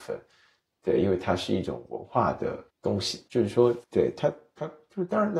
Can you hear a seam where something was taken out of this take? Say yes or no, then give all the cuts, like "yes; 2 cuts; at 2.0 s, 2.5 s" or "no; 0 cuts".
yes; 3 cuts; at 2.7 s, 3.3 s, 3.8 s